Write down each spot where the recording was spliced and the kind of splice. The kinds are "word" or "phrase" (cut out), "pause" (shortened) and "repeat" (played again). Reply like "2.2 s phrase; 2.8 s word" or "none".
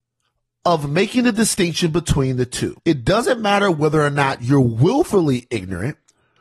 2.8 s pause

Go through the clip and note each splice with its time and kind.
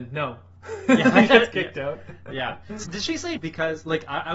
1.3 s word; 2.8 s word; 3.4 s word

